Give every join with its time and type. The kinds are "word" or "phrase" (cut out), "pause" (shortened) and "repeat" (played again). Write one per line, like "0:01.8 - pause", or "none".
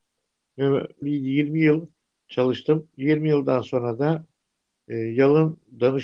0:01.0 - phrase
0:02.0 - pause